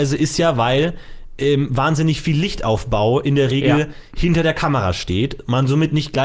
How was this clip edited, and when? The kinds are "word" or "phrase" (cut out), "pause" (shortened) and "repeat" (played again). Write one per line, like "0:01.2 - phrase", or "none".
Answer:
none